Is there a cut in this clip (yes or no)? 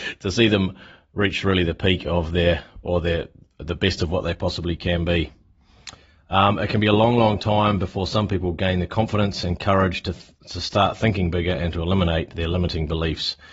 no